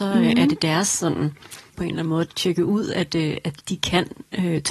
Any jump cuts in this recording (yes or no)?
yes